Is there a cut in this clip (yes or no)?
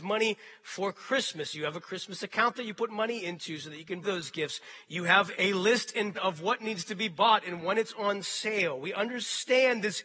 yes